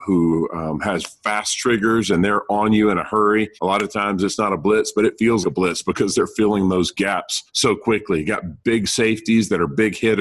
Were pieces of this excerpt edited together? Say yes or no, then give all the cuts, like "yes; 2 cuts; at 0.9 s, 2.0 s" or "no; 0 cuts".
yes; 3 cuts; at 3.6 s, 5.4 s, 7.5 s